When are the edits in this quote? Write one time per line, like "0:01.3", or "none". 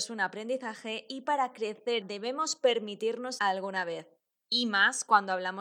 0:02.0
0:03.4